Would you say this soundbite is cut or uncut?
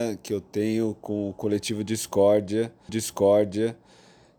cut